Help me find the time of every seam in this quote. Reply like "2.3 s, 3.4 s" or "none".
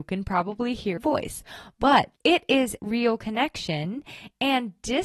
1.0 s, 2.2 s, 2.8 s